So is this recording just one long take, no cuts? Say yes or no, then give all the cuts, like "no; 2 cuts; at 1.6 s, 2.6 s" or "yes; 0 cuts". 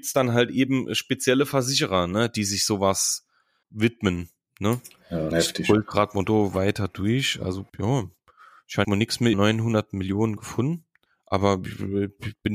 no; 6 cuts; at 3.6 s, 5.3 s, 7.7 s, 8.8 s, 9.3 s, 11.1 s